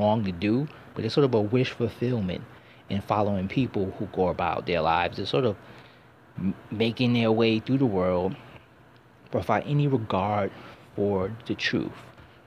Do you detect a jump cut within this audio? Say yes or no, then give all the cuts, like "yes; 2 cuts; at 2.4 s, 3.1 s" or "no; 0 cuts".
no; 0 cuts